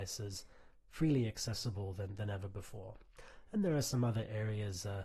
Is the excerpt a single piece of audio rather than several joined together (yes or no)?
yes